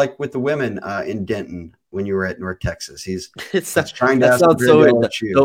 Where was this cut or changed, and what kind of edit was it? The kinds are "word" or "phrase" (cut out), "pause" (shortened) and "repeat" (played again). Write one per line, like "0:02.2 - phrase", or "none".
none